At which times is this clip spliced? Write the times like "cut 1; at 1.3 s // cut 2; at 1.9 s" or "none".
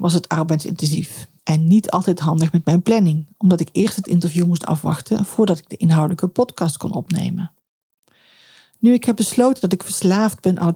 cut 1; at 1.4 s